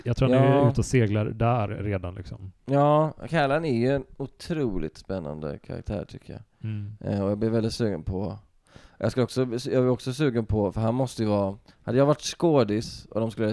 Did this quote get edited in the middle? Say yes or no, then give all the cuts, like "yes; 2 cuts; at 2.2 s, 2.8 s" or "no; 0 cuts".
no; 0 cuts